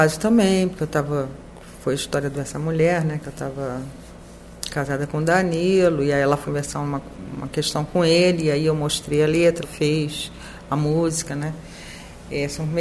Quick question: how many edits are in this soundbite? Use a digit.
2